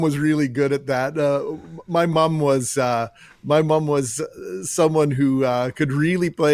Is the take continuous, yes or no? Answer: yes